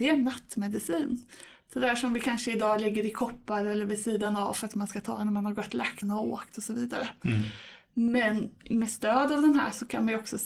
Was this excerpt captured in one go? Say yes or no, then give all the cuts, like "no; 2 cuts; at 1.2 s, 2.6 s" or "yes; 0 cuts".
no; 1 cut; at 6.0 s